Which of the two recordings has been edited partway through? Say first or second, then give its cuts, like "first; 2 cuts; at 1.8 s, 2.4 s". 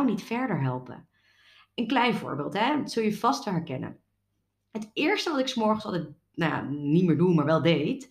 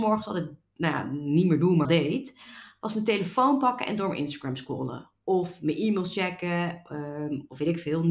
second; 1 cut; at 1.8 s